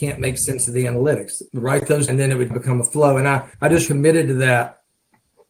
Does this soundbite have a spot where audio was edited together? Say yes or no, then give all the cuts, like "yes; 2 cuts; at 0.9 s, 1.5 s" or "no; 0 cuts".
yes; 5 cuts; at 1.5 s, 2.1 s, 2.5 s, 3.5 s, 3.9 s